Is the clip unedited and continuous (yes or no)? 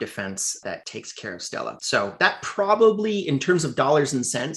yes